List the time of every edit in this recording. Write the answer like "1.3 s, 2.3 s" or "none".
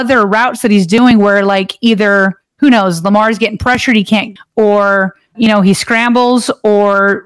4.4 s, 5.3 s